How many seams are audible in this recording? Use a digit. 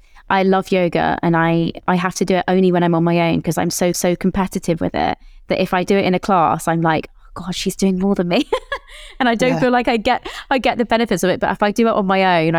2